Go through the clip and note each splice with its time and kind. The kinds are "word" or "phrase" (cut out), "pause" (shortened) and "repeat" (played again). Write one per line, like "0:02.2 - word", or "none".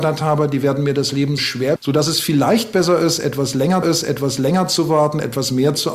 0:01.4 - word
0:01.8 - phrase
0:03.8 - repeat